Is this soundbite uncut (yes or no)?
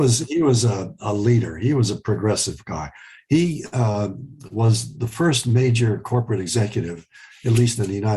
yes